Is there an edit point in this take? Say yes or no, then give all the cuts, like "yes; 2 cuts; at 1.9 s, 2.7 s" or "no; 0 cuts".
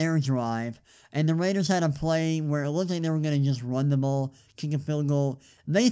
no; 0 cuts